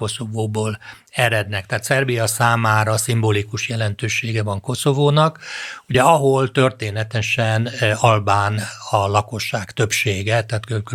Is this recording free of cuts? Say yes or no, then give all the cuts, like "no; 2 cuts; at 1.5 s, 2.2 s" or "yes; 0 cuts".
yes; 0 cuts